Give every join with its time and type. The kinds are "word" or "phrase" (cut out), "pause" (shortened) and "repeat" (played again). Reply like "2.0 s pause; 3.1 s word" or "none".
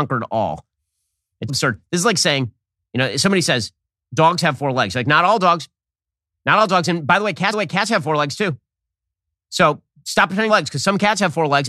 1.5 s word; 7.5 s repeat; 10.5 s phrase